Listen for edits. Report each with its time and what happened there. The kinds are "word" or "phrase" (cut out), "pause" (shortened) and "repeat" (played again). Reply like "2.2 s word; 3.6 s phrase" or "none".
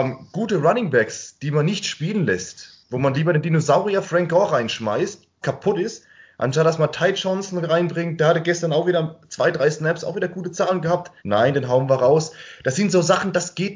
5.4 s phrase; 11.2 s pause